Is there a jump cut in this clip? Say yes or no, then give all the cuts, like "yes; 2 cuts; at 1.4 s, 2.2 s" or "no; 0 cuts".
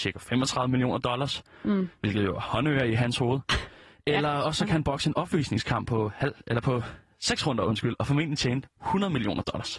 no; 0 cuts